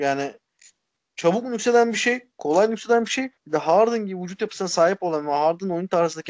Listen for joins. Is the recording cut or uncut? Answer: cut